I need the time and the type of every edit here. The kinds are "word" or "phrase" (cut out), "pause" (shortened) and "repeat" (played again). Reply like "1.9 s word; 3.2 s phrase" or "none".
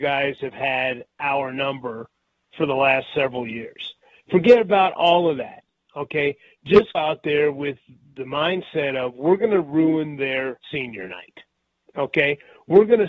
2.5 s word; 6.9 s word; 10.6 s pause